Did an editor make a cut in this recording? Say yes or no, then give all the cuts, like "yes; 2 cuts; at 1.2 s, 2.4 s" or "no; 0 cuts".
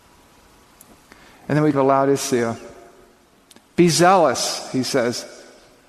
yes; 1 cut; at 1.7 s